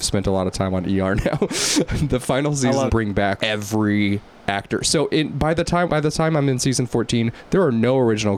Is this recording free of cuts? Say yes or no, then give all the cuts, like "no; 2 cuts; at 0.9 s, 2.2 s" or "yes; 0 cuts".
no; 3 cuts; at 2.9 s, 3.4 s, 5.9 s